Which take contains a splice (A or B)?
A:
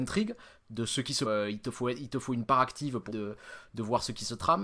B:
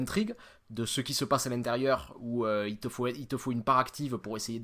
A